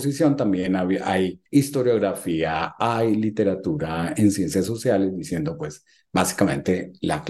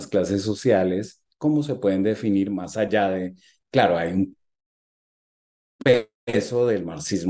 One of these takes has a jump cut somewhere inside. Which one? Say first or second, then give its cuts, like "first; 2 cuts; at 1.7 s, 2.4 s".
first; 1 cut; at 1.5 s